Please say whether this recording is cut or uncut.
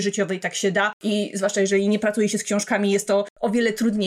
uncut